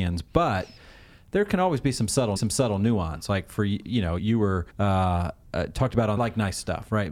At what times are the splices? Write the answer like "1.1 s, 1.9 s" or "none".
2.4 s, 4.2 s, 4.7 s, 6.2 s